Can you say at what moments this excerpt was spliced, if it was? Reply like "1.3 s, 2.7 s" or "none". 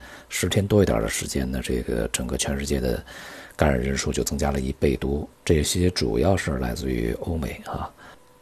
5.3 s